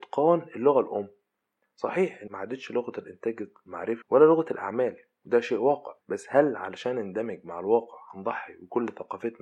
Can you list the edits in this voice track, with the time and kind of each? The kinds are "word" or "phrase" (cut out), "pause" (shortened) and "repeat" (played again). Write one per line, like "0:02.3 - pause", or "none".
0:02.3 - phrase
0:04.0 - phrase
0:06.0 - pause